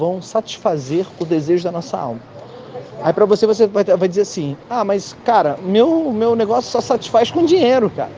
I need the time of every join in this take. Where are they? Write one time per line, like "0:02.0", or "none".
none